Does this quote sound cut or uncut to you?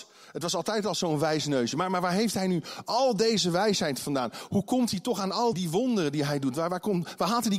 cut